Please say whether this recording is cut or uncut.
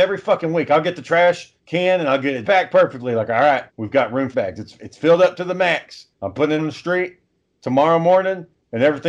cut